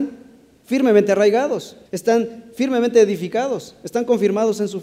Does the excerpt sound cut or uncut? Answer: cut